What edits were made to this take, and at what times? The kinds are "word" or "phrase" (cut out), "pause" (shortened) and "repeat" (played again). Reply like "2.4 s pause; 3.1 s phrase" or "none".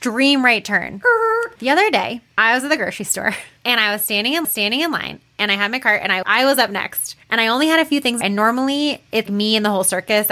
1.6 s pause; 4.4 s repeat; 6.2 s word; 8.2 s phrase; 9.3 s word